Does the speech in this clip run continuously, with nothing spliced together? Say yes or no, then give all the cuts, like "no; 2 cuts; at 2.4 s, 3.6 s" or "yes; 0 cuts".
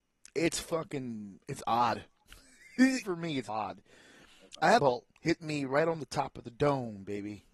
no; 4 cuts; at 3.0 s, 3.5 s, 4.8 s, 5.2 s